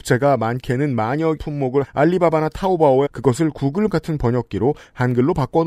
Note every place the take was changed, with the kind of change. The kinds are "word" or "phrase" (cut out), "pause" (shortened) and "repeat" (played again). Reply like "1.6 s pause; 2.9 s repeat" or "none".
1.4 s word; 1.8 s word; 3.1 s word; 3.9 s word